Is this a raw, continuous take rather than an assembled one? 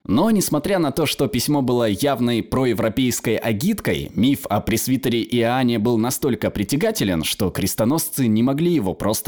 yes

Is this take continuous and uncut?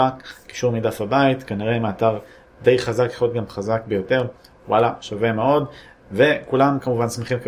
yes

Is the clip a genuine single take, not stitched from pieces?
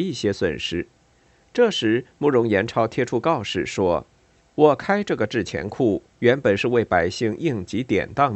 no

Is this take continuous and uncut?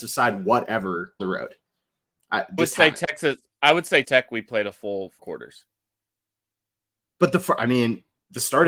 no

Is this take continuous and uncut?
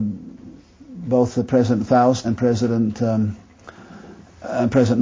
no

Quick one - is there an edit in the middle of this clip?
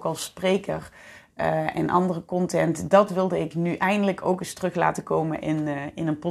no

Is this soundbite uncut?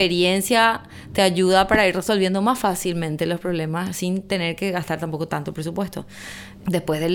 yes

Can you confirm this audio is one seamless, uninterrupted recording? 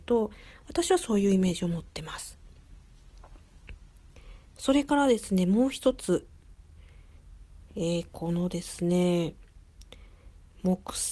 no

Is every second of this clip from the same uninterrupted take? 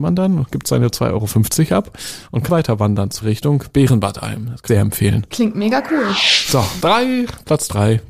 no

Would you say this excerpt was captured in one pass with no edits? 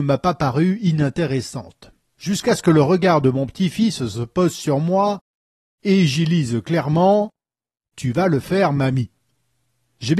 yes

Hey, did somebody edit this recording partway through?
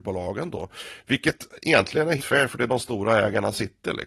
yes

